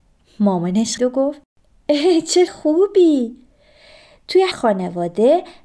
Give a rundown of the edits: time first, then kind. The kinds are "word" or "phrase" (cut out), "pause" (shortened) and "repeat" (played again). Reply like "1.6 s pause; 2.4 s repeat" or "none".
1.0 s word; 2.5 s word; 4.5 s word